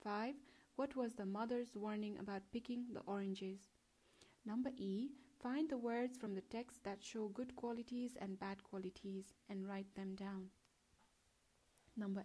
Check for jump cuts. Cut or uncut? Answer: uncut